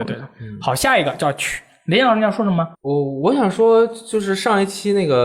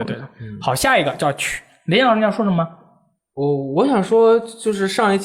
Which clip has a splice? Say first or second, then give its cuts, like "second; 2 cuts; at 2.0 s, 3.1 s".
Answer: first; 1 cut; at 2.7 s